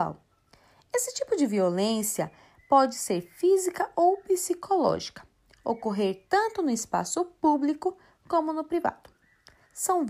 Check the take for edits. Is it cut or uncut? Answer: uncut